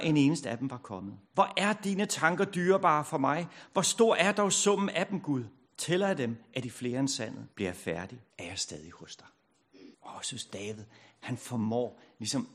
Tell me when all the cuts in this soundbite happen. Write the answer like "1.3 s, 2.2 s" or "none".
1.3 s, 5.7 s, 7.5 s, 8.3 s, 9.9 s